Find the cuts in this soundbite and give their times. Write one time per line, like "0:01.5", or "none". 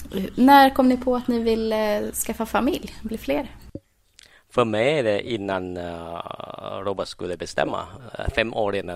none